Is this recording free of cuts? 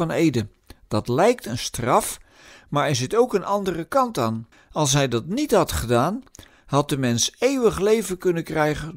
no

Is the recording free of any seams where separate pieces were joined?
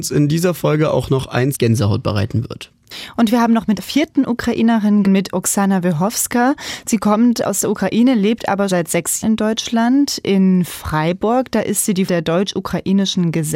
no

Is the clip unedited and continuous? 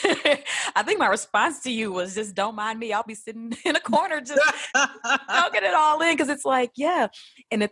yes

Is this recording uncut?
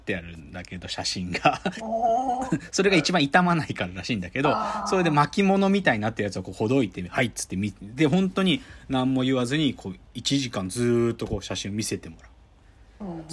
yes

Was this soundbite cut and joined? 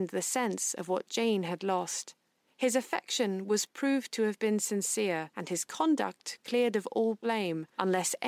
no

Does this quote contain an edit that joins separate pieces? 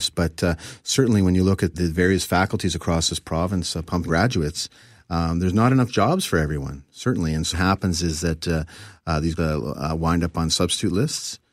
yes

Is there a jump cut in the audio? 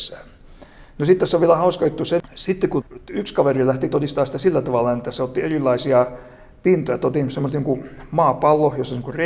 no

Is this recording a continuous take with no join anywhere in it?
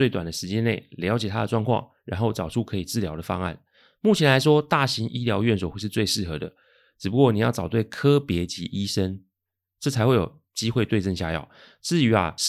yes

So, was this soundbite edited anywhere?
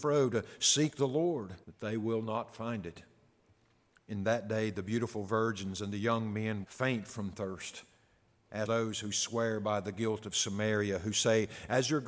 yes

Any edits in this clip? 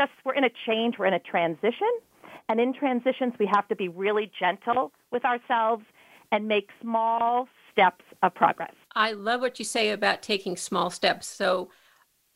yes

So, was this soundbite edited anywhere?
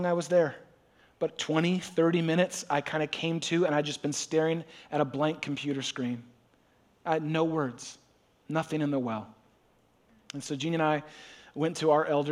no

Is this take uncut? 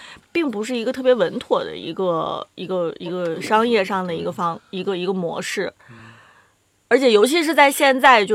yes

